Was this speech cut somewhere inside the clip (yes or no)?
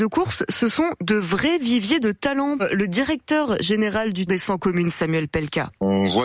yes